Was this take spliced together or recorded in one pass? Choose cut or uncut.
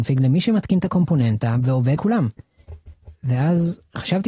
cut